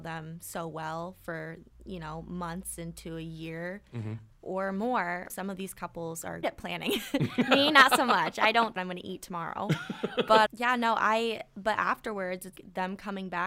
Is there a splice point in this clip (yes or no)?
yes